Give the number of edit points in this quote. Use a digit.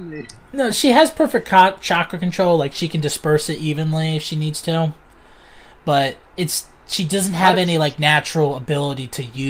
0